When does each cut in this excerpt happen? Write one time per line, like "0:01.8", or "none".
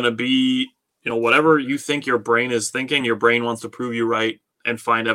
none